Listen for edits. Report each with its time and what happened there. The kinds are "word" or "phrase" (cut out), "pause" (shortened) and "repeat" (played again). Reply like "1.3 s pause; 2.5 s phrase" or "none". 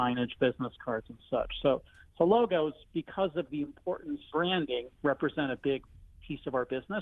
4.3 s word; 4.9 s pause